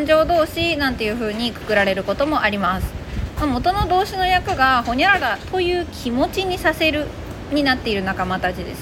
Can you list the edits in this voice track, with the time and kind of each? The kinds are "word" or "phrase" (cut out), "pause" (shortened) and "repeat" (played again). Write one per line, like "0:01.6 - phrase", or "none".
none